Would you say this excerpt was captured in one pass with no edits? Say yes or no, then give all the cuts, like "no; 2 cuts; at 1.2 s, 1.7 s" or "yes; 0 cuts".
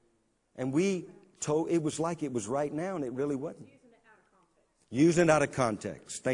yes; 0 cuts